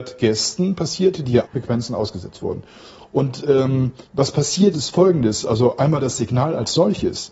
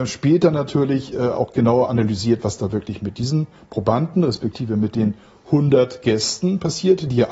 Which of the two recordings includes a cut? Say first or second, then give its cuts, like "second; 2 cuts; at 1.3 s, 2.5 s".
first; 3 cuts; at 1.4 s, 4.1 s, 4.7 s